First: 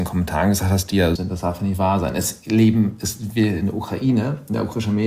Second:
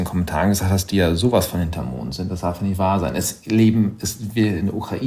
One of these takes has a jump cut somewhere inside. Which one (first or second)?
first